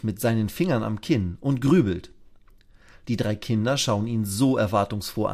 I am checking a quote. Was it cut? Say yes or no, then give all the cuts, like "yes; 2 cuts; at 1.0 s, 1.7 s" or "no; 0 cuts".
no; 0 cuts